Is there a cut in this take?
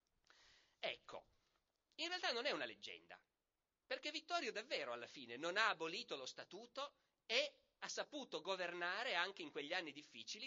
no; 0 cuts

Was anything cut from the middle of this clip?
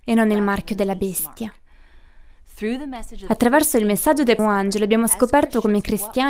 yes; 1 cut; at 4.4 s

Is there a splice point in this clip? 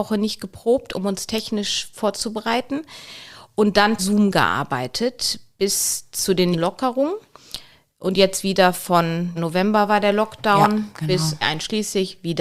yes; 4 cuts; at 4.0 s, 6.5 s, 9.4 s, 11.4 s

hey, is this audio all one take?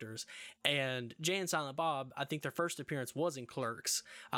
yes; 0 cuts

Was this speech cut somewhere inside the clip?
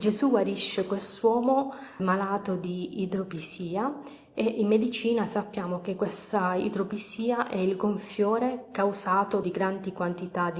yes; 2 cuts; at 2.0 s, 9.4 s

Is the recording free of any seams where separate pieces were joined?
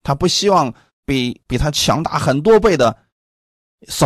yes; 0 cuts

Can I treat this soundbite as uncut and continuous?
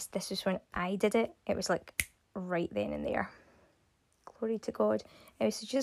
yes; 0 cuts

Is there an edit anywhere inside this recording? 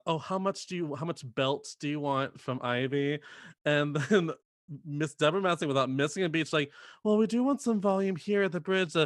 no; 0 cuts

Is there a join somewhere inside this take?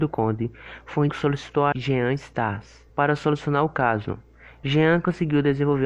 yes; 3 cuts; at 1.1 s, 1.7 s, 2.9 s

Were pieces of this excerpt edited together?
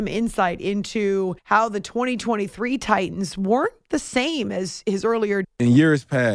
yes; 2 cuts; at 1.4 s, 5.4 s

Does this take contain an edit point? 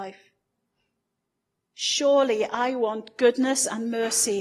no; 0 cuts

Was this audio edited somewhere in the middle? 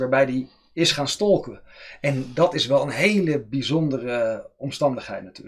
no; 0 cuts

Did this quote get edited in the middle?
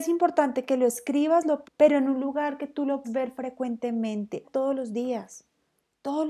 yes; 3 cuts; at 1.6 s, 3.0 s, 4.4 s

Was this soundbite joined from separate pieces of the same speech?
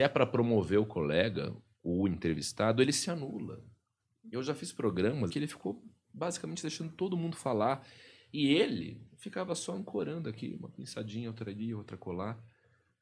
yes; 2 cuts; at 5.3 s, 9.1 s

